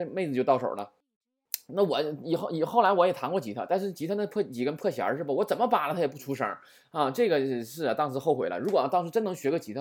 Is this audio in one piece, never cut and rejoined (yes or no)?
yes